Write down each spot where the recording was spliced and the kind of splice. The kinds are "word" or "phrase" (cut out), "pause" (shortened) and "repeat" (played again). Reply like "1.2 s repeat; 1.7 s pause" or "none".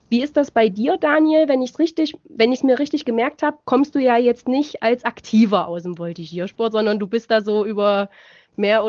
none